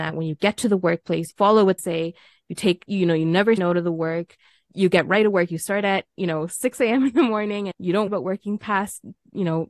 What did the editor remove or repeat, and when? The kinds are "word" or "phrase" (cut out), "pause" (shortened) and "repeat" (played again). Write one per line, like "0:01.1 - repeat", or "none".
0:01.3 - word
0:01.8 - word
0:03.6 - word
0:04.7 - word
0:07.7 - word
0:08.1 - word